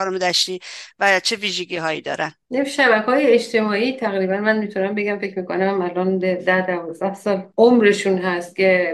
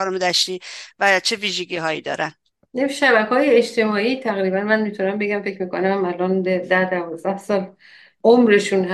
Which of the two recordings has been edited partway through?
first; 2 cuts; at 2.4 s, 7.5 s

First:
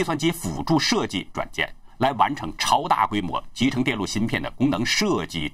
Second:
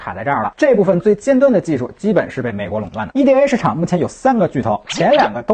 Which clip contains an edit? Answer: first; 1 cut; at 1.3 s

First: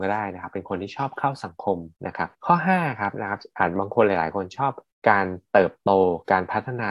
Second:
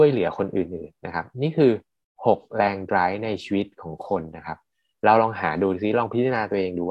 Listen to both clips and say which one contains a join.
first; 3 cuts; at 2.0 s, 2.3 s, 4.9 s

